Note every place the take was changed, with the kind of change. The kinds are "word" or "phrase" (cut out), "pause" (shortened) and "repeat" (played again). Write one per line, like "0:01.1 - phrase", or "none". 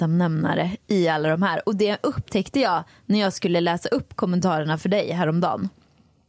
none